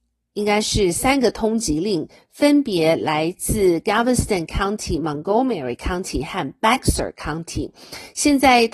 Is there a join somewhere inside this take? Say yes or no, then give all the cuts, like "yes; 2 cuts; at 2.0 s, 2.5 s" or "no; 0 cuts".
no; 0 cuts